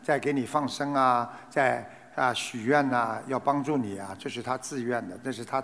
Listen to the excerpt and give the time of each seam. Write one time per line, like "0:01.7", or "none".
none